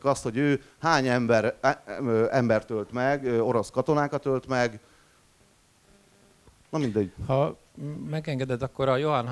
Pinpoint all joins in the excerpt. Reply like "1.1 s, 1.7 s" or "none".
none